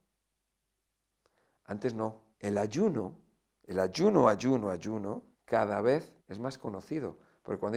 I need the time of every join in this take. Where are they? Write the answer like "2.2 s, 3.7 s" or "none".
2.3 s, 5.3 s, 6.2 s